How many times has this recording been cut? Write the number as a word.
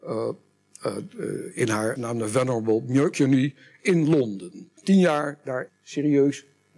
four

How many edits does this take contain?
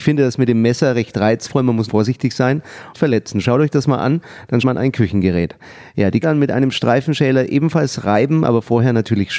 four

